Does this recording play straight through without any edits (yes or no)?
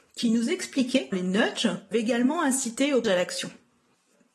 no